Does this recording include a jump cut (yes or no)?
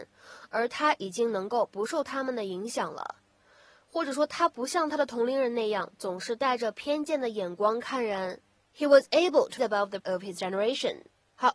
yes